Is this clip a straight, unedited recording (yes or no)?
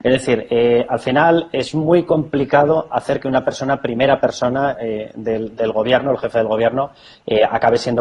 yes